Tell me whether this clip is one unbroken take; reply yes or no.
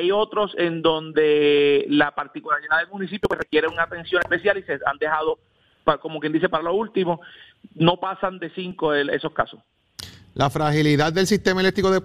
yes